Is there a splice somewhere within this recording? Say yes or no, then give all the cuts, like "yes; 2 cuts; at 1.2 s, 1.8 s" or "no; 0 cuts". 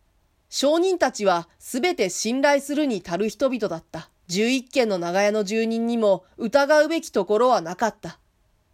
yes; 1 cut; at 4.2 s